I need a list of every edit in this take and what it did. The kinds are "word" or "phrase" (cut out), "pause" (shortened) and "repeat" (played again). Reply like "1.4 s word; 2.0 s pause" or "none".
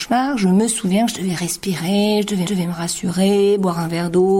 2.5 s repeat